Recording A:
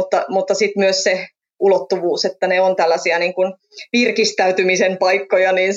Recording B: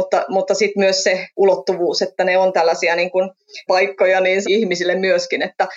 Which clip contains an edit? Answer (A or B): B